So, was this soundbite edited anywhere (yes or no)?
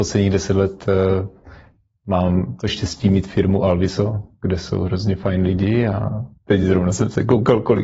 no